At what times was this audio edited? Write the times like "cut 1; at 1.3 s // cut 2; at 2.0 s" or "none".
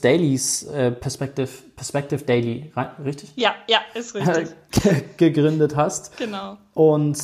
none